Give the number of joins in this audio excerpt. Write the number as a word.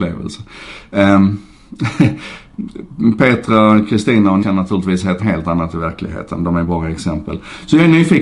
two